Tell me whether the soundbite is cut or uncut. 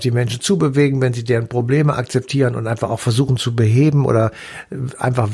uncut